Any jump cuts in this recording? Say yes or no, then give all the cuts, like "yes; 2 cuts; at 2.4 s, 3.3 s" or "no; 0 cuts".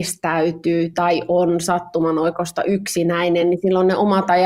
no; 0 cuts